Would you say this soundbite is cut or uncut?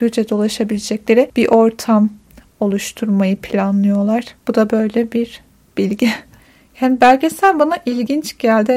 uncut